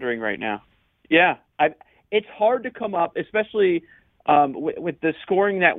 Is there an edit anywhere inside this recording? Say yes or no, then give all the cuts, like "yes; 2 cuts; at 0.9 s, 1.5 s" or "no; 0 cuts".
no; 0 cuts